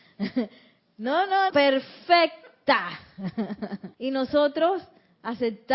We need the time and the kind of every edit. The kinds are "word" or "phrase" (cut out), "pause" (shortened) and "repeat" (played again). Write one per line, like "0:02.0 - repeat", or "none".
0:01.5 - word
0:03.9 - pause

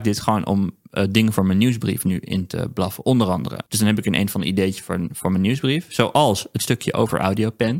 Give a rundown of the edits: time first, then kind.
0:03.7 - pause

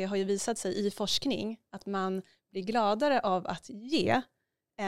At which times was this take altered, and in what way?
none

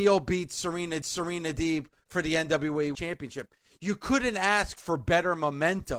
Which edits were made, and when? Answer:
0:01.0 - repeat
0:02.9 - word

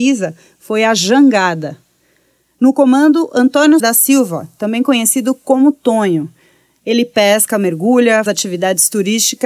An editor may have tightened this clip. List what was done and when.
0:03.8 - word
0:08.3 - word

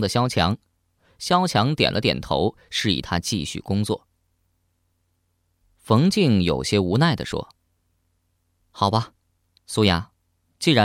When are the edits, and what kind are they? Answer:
0:07.6 - pause

